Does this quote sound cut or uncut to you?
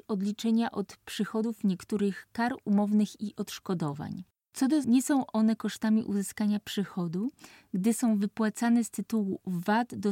cut